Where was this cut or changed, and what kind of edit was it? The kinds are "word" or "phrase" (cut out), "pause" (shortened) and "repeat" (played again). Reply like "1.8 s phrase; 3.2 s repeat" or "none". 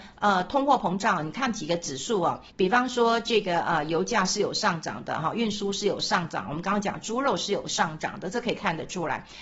2.5 s pause